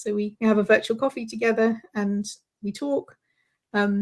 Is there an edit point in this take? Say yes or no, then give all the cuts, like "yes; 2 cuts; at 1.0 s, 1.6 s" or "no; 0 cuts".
no; 0 cuts